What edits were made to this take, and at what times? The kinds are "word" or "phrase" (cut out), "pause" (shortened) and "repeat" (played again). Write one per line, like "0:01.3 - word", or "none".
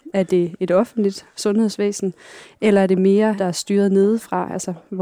0:03.4 - phrase